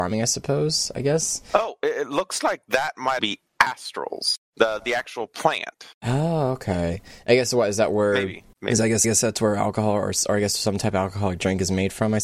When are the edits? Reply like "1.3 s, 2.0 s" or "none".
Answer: 3.2 s, 4.4 s, 5.9 s, 8.5 s, 9.0 s